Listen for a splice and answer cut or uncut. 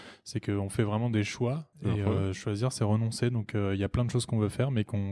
cut